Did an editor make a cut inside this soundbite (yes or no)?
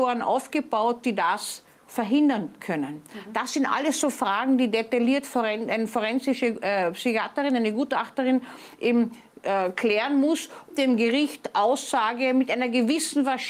yes